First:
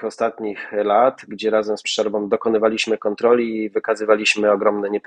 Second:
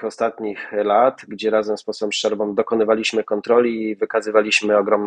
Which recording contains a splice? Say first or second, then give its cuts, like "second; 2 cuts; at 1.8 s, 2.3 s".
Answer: first; 1 cut; at 1.8 s